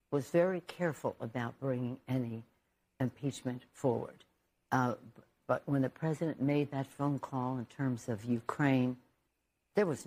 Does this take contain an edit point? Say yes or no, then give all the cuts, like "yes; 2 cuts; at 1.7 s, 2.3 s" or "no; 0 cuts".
no; 0 cuts